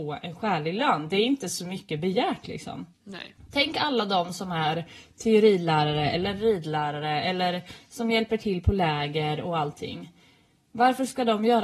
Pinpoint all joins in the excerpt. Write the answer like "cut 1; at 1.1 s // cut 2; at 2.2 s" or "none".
cut 1; at 2.9 s